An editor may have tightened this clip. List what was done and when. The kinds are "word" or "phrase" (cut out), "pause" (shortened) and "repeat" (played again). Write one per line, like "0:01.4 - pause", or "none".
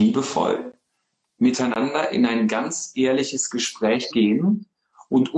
0:04.1 - word